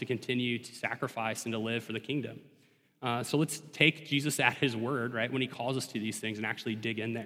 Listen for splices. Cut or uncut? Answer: uncut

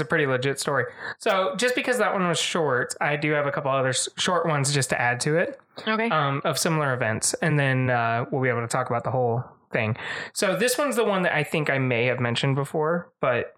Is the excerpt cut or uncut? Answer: uncut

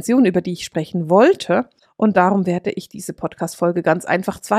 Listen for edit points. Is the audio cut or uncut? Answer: uncut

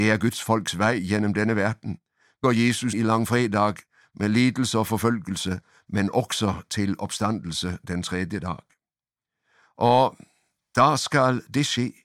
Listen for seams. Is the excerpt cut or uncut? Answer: cut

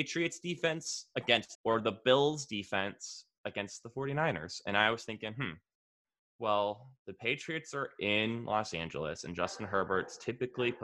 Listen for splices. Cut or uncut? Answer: cut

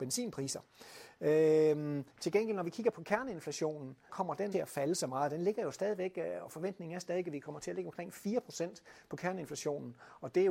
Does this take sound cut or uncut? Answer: cut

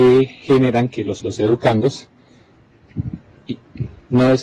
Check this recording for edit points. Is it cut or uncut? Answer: cut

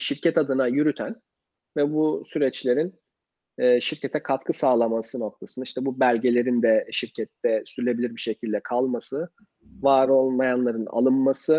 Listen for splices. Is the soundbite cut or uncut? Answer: uncut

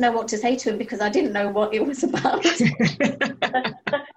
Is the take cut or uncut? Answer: uncut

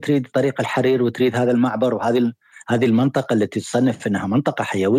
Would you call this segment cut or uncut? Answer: uncut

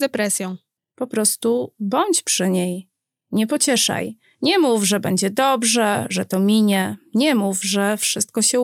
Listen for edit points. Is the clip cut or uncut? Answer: uncut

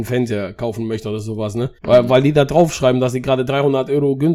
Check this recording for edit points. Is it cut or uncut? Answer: cut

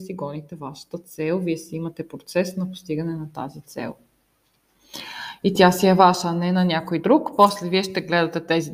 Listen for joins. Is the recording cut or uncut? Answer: uncut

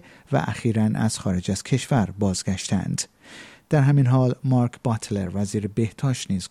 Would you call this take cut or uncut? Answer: uncut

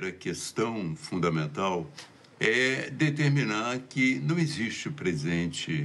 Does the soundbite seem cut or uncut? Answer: uncut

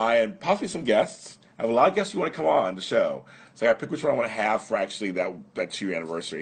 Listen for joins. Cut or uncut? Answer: uncut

